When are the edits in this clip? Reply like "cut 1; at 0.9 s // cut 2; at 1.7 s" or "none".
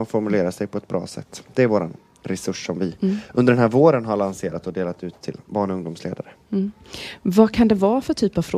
none